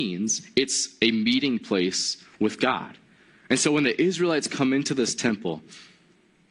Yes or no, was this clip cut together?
no